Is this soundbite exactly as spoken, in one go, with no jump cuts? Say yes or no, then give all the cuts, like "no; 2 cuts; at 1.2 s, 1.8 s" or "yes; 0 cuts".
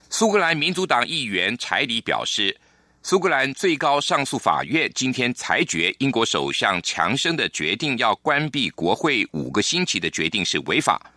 yes; 0 cuts